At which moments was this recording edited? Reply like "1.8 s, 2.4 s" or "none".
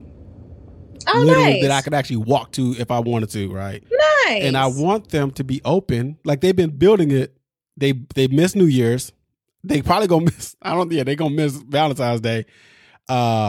3.8 s